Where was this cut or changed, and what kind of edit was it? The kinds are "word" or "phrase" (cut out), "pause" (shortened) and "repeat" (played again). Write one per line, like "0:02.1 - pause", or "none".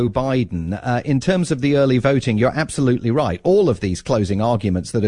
none